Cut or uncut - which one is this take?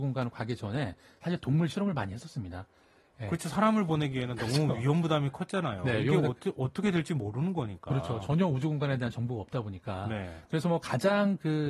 uncut